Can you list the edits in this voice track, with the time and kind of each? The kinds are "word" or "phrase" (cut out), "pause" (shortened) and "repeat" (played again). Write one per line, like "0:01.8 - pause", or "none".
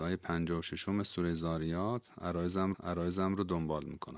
0:02.7 - repeat